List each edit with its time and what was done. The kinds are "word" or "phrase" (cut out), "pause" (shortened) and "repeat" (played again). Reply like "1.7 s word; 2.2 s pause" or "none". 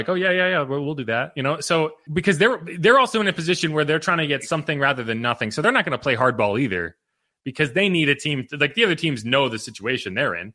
none